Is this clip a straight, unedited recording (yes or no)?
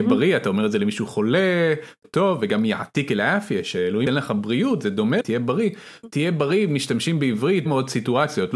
no